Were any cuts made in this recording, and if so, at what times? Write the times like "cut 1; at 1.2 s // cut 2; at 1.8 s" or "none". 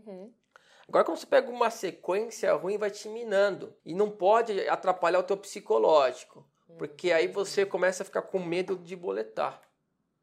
cut 1; at 3.8 s